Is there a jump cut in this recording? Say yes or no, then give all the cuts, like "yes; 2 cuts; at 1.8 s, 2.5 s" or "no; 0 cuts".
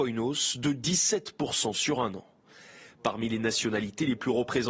no; 0 cuts